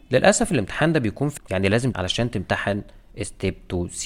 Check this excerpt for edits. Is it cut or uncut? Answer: cut